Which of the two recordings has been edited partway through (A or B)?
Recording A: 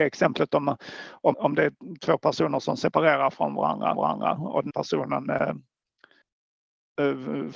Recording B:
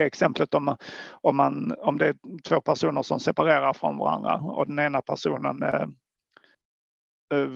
A